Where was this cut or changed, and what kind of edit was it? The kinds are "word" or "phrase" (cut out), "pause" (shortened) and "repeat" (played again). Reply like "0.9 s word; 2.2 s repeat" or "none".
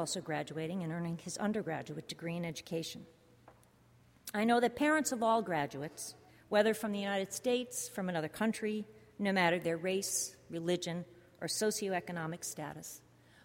6.3 s pause